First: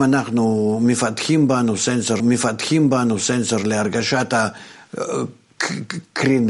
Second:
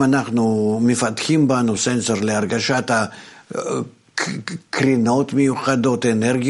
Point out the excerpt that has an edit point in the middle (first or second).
first